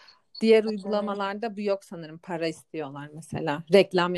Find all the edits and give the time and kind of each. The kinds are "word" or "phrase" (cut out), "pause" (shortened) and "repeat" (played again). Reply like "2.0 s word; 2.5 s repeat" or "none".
none